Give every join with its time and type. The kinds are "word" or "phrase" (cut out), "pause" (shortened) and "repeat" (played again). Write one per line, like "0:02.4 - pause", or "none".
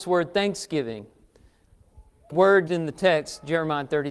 0:02.3 - word
0:02.7 - word